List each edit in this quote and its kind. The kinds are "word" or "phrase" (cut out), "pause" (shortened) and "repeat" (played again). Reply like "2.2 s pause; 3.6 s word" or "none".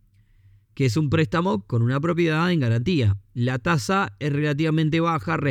none